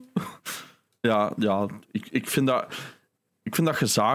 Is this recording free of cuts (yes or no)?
yes